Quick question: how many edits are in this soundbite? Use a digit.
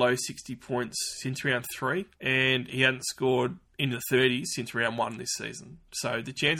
2